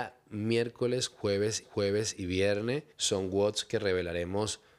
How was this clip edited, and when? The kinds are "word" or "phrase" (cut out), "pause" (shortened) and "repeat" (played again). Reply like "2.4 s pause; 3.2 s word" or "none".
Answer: 1.6 s repeat; 2.9 s pause